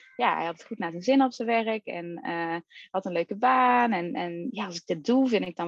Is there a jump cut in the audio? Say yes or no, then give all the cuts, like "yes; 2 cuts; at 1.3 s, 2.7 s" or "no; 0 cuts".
no; 0 cuts